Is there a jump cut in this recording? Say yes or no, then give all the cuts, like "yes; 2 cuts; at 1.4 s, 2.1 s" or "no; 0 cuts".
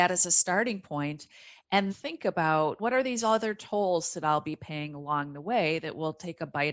yes; 2 cuts; at 1.9 s, 2.8 s